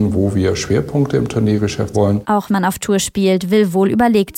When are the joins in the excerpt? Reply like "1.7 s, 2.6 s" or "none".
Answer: 1.9 s, 2.5 s